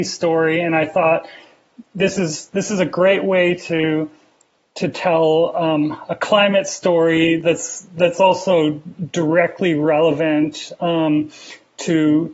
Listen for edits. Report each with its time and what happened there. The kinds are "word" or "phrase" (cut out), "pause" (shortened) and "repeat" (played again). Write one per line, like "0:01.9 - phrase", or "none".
none